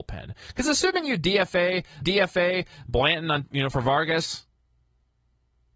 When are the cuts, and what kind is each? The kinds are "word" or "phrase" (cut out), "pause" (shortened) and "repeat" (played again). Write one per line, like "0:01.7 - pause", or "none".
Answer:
0:02.0 - repeat
0:03.4 - word